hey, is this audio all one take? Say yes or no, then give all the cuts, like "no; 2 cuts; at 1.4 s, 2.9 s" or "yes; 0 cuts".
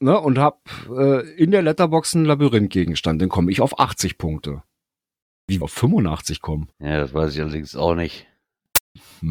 no; 2 cuts; at 5.6 s, 6.7 s